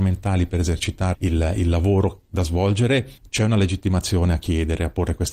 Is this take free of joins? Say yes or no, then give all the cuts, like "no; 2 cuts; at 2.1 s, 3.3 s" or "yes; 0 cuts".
no; 2 cuts; at 1.1 s, 3.2 s